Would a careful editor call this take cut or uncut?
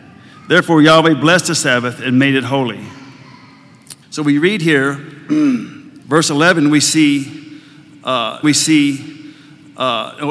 cut